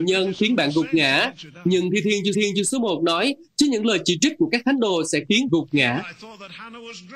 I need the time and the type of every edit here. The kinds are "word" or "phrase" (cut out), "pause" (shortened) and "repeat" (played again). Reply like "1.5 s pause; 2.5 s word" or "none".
2.3 s repeat; 5.5 s word

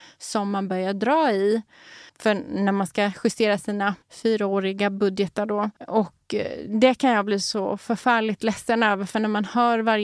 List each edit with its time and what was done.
2.1 s pause; 4.0 s pause; 5.8 s pause

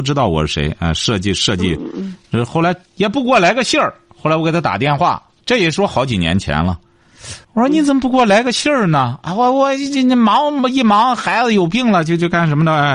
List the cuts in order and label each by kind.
2.9 s pause; 5.4 s pause; 7.4 s pause

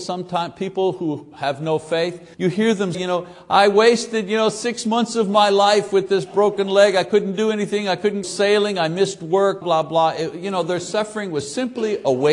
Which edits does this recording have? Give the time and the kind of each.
2.3 s pause; 2.9 s word; 8.2 s word; 9.6 s word

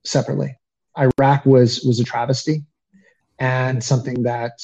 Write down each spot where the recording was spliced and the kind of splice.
none

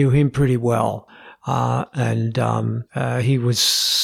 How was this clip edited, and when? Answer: none

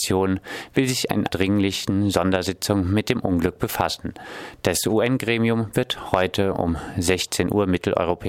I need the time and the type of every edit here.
1.3 s word

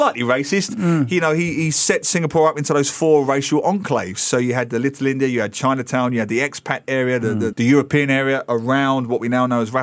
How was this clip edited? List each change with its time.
7.5 s word

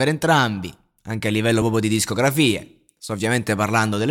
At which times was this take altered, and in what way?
none

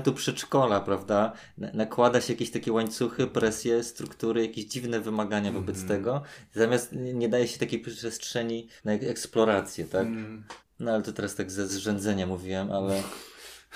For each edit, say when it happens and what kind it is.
8.8 s pause; 10.6 s pause; 11.7 s word

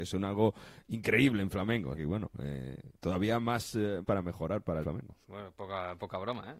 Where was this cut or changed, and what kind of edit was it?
1.9 s word; 4.0 s phrase; 4.8 s phrase; 5.2 s pause

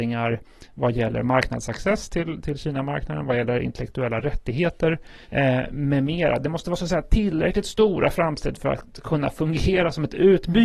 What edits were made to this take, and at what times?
5.2 s pause

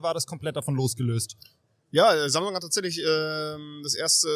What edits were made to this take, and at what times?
none

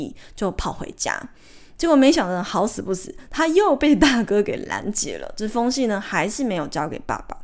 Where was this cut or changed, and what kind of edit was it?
none

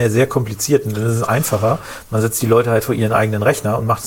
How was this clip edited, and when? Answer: none

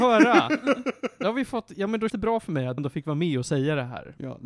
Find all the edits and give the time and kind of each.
2.1 s word; 2.8 s word

